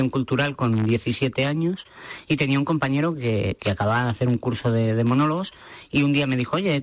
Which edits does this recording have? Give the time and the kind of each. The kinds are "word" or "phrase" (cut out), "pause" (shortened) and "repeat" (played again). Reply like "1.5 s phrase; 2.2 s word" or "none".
none